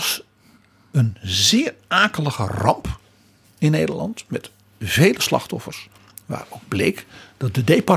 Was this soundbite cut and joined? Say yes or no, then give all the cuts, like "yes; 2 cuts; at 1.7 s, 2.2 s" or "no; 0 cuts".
no; 0 cuts